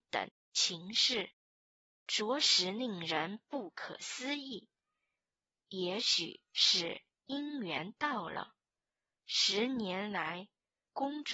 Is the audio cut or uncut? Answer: uncut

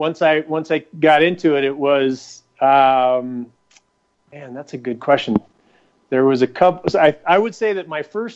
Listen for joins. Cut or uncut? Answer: uncut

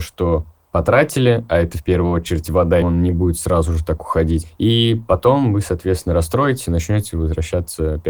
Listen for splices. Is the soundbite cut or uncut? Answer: cut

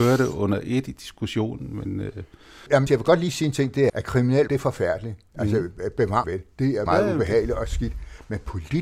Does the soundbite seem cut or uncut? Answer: cut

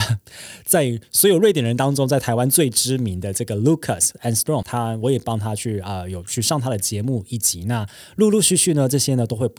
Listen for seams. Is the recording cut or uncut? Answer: cut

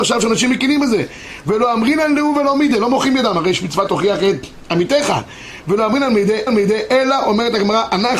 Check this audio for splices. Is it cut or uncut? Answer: cut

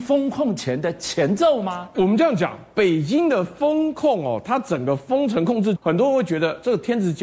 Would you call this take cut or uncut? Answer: cut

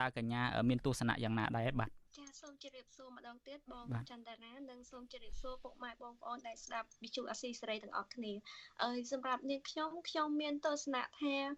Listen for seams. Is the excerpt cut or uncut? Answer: cut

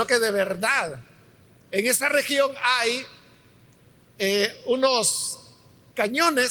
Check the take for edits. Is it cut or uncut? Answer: uncut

